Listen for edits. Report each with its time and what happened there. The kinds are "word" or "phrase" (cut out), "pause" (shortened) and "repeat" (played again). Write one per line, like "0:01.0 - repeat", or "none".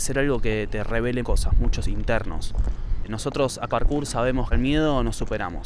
0:01.2 - word
0:01.8 - phrase
0:03.7 - word
0:04.5 - phrase